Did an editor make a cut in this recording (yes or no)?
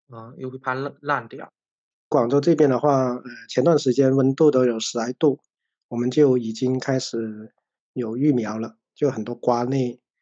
no